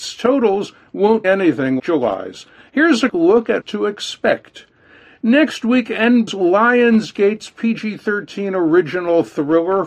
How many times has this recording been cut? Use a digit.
5